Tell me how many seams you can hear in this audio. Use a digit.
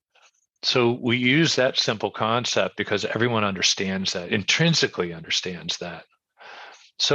0